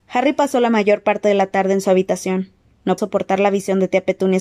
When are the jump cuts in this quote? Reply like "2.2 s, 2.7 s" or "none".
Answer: 3.0 s